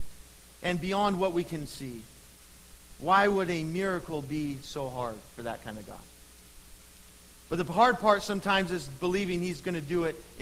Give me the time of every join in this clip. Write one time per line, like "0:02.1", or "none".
none